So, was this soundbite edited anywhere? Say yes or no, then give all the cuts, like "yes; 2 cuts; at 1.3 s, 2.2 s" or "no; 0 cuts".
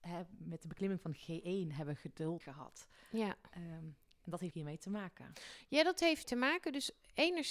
yes; 3 cuts; at 2.4 s, 4.5 s, 6.2 s